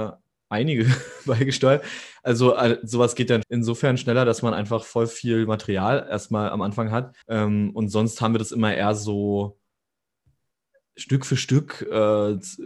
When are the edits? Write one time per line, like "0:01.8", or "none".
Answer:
0:03.4
0:07.2